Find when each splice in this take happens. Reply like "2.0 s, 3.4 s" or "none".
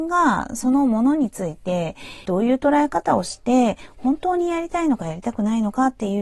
2.2 s